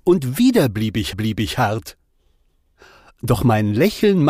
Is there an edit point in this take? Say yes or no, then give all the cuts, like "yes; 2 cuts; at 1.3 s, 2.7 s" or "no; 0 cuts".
yes; 1 cut; at 1.1 s